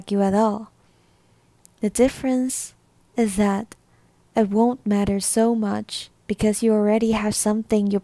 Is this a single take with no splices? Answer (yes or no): yes